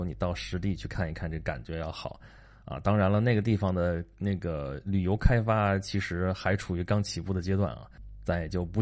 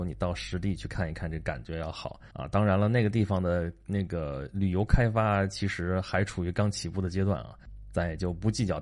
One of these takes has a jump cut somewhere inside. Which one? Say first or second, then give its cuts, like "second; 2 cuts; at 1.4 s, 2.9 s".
second; 1 cut; at 2.3 s